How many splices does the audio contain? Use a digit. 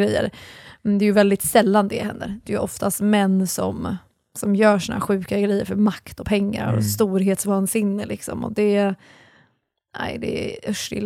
0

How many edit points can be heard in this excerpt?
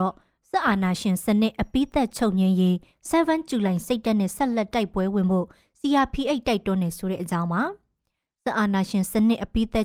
0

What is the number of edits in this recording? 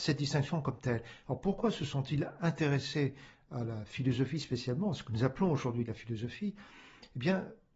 0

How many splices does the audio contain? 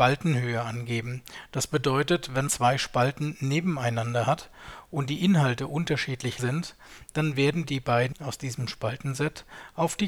3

